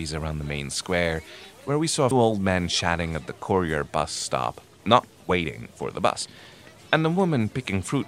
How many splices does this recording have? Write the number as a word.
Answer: one